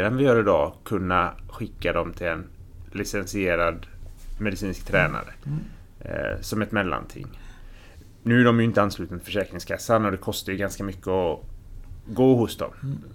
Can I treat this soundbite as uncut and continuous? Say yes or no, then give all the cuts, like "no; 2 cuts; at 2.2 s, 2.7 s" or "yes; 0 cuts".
yes; 0 cuts